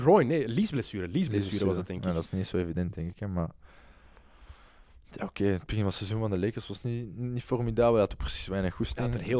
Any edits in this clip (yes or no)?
no